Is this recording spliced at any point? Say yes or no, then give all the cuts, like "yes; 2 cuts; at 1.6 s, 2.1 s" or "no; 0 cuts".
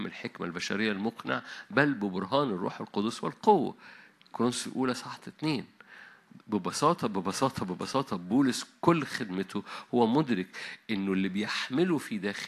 no; 0 cuts